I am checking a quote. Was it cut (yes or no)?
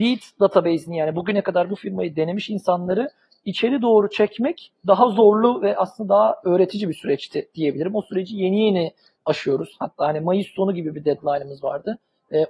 no